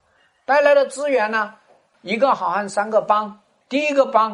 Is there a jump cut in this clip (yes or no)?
no